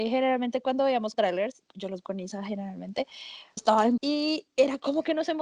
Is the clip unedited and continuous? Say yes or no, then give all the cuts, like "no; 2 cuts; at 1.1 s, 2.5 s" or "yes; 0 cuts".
no; 4 cuts; at 1.1 s, 2.0 s, 3.6 s, 4.0 s